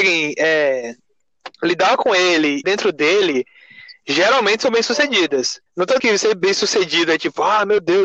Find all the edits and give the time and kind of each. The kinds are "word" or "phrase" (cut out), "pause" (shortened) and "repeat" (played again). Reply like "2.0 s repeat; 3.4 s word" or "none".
1.5 s pause; 2.6 s phrase; 5.7 s pause; 6.0 s word